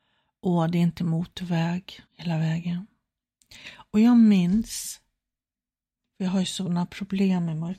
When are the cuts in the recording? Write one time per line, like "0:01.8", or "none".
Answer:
0:02.1